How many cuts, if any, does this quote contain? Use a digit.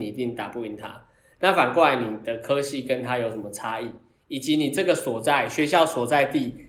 0